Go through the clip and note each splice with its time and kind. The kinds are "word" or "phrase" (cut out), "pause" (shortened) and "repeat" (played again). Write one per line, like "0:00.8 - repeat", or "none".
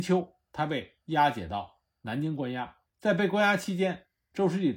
0:02.8 - pause